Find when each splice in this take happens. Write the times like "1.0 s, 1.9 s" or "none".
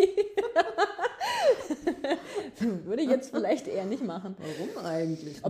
none